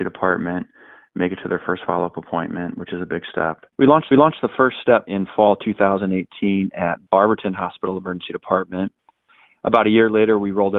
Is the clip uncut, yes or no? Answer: no